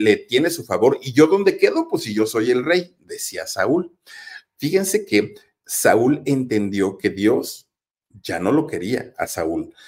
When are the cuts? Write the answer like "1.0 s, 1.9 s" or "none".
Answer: none